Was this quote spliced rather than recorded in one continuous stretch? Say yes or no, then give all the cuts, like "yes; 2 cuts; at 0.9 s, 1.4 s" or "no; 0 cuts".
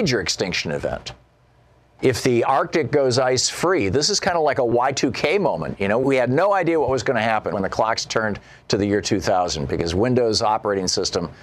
no; 0 cuts